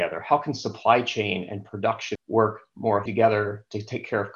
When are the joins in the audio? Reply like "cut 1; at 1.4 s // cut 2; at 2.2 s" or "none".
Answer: cut 1; at 2.2 s // cut 2; at 3.1 s